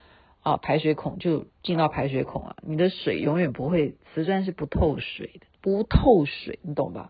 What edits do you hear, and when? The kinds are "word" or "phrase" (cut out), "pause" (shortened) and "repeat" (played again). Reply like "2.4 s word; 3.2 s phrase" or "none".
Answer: 1.5 s pause; 5.5 s pause